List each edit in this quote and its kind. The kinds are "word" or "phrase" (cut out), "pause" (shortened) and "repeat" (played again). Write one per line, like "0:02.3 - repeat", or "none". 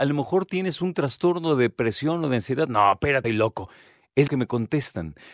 0:03.2 - phrase
0:04.3 - phrase